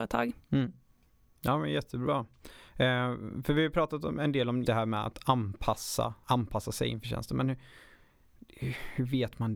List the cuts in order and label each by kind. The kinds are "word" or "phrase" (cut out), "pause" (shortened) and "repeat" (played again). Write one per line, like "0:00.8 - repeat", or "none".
0:04.6 - word
0:06.2 - word